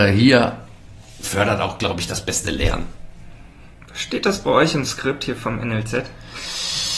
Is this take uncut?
yes; 0 cuts

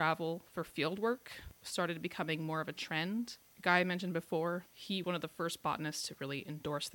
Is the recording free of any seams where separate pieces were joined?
no; 2 cuts; at 4.7 s, 5.0 s

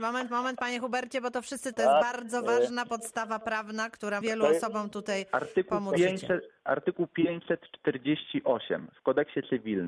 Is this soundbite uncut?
no; 2 cuts; at 1.7 s, 4.2 s

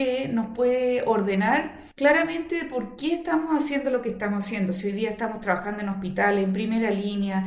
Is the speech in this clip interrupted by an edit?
yes; 1 cut; at 1.9 s

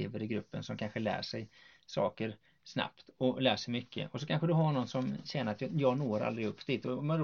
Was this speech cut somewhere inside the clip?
no; 0 cuts

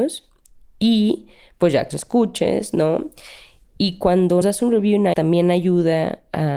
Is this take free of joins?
no; 3 cuts; at 1.9 s, 4.4 s, 5.1 s

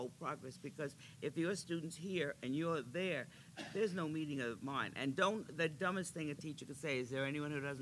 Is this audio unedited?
yes; 0 cuts

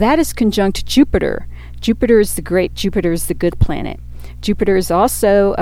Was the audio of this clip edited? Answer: yes; 2 cuts; at 2.7 s, 3.5 s

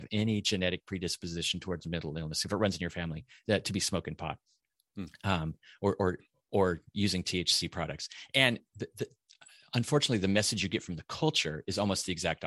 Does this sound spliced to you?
no; 0 cuts

